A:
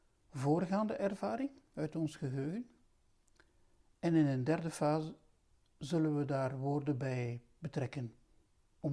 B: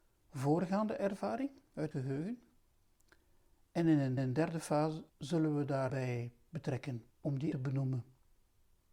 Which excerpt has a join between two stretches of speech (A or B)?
B